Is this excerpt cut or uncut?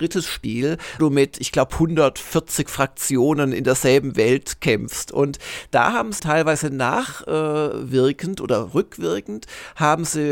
cut